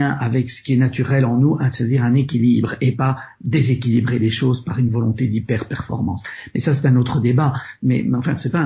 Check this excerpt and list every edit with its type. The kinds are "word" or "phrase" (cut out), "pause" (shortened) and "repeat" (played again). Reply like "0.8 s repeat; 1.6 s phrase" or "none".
none